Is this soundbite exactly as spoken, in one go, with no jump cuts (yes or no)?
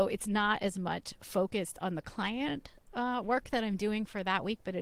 yes